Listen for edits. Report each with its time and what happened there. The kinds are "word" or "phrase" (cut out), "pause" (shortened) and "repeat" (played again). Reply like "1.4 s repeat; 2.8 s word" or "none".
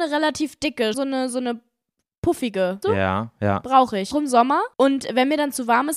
0.9 s word; 2.8 s word; 4.1 s word; 4.7 s pause